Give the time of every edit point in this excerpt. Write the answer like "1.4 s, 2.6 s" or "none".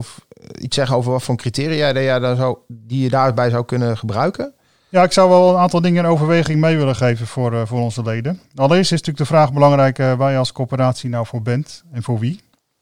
none